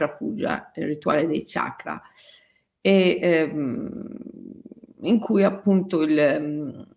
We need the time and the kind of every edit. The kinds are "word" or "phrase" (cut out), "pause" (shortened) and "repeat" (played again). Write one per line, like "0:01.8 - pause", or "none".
none